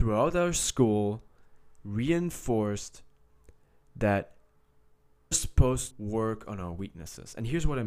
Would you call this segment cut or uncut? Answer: cut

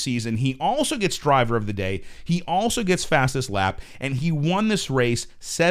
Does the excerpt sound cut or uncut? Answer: uncut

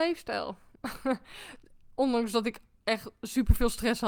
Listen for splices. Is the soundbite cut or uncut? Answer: uncut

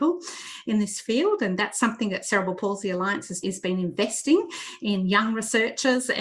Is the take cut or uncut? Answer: cut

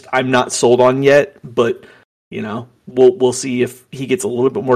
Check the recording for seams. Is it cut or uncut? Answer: uncut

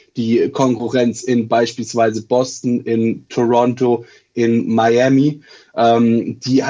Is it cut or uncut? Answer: uncut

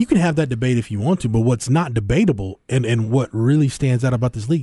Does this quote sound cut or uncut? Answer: uncut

